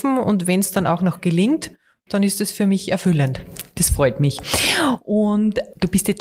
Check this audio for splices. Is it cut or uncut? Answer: uncut